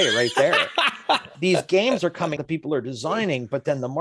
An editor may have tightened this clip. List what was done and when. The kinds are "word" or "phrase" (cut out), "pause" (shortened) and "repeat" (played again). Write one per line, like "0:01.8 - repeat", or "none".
0:01.3 - word
0:02.4 - word